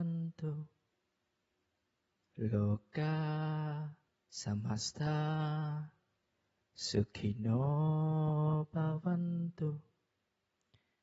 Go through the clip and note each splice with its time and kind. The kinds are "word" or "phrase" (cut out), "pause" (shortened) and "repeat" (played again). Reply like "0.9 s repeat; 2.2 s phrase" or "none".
4.1 s pause